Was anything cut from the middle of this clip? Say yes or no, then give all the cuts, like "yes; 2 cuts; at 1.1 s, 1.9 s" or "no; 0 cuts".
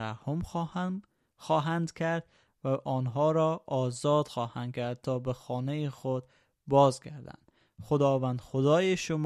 no; 0 cuts